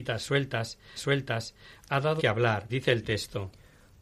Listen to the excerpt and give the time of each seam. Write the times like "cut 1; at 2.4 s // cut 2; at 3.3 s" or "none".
cut 1; at 1.0 s // cut 2; at 2.2 s // cut 3; at 2.7 s